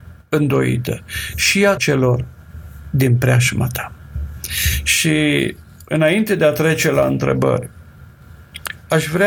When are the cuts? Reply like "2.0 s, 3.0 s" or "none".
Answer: 1.8 s

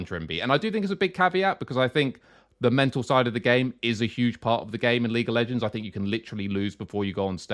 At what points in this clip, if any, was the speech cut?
none

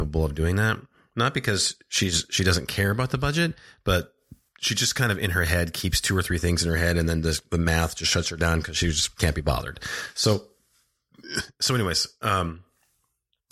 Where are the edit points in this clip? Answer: none

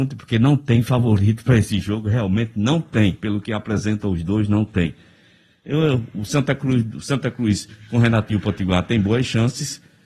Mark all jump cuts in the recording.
none

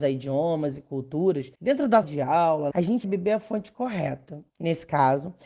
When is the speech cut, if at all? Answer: 1.5 s, 2.0 s, 2.7 s, 3.0 s, 4.5 s

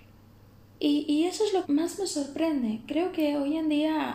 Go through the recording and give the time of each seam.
1.6 s

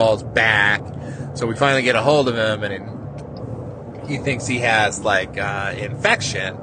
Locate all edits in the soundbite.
none

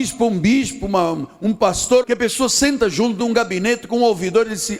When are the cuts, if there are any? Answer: 2.0 s, 3.2 s

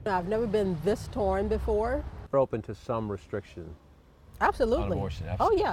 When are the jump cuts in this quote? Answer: 2.3 s

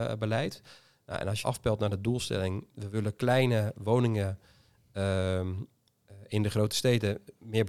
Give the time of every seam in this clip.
1.4 s, 2.7 s

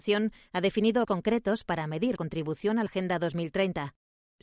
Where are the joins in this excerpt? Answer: 1.0 s, 2.2 s, 2.9 s

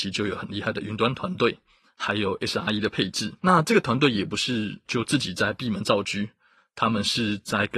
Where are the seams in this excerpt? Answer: 3.4 s

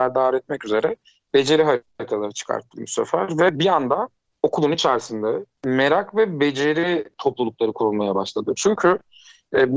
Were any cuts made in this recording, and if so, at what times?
none

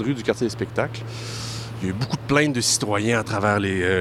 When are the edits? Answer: none

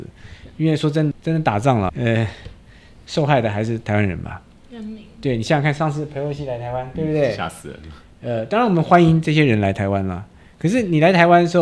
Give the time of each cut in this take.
1.1 s, 1.9 s, 6.9 s

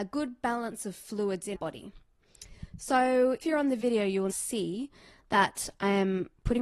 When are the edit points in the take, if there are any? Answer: 1.5 s, 3.4 s, 4.3 s

